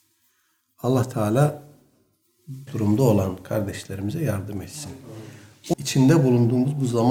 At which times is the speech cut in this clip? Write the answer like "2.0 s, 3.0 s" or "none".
2.7 s, 5.7 s